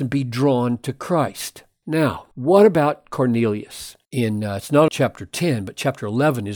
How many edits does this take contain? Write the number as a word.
three